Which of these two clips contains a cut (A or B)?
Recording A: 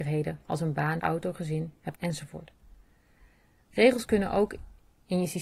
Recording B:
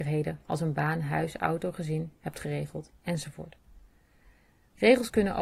A